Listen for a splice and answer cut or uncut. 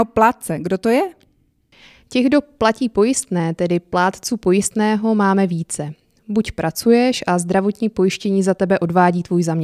uncut